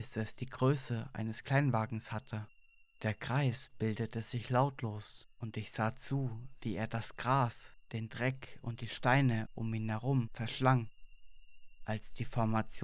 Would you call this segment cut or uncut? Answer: uncut